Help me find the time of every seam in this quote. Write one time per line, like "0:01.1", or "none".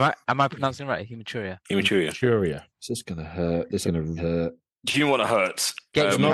0:01.6
0:02.7
0:03.8
0:04.2